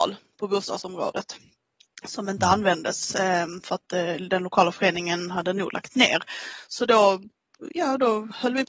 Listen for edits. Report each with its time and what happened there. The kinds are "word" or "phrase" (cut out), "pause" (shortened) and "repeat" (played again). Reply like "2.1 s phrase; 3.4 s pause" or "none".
none